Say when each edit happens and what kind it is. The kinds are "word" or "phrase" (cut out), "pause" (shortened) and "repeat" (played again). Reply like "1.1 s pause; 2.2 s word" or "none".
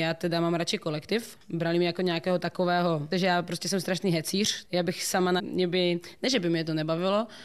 3.1 s word; 4.6 s word; 5.4 s word